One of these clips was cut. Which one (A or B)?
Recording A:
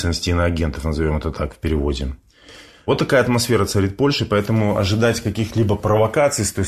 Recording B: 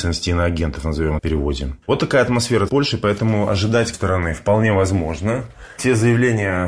B